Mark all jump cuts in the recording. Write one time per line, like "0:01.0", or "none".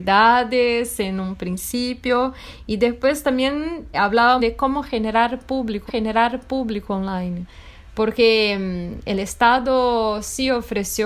0:03.9
0:04.4
0:05.9